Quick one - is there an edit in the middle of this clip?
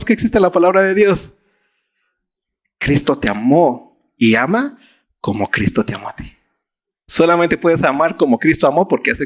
no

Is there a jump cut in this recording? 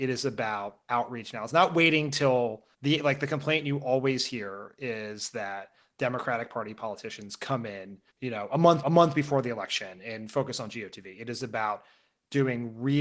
yes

